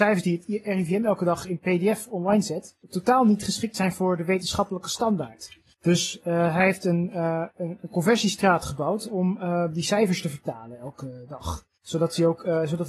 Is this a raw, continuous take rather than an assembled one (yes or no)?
no